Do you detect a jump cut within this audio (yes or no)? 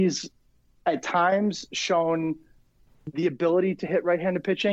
no